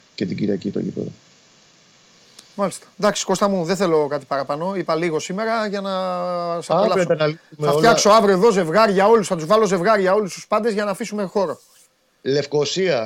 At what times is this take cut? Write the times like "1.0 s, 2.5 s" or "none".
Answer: none